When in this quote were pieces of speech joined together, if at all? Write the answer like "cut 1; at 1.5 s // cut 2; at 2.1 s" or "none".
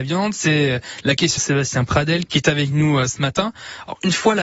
cut 1; at 1.4 s // cut 2; at 2.3 s